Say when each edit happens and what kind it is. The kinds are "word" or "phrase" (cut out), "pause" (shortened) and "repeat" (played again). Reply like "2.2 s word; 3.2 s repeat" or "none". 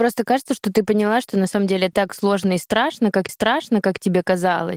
1.9 s word; 3.3 s repeat

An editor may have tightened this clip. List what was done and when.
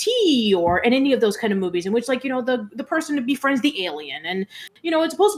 none

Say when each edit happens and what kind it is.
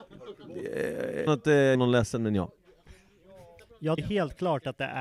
1.3 s word; 1.7 s word; 4.0 s word

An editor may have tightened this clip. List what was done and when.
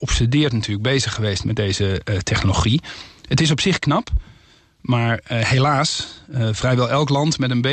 none

